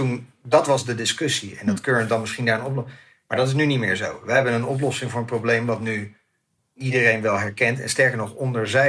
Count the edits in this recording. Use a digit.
0